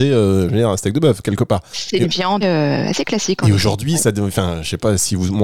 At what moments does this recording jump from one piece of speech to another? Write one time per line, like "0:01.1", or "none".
0:02.4